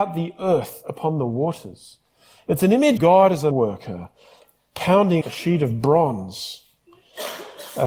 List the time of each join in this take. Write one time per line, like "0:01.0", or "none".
0:03.0
0:03.5
0:05.2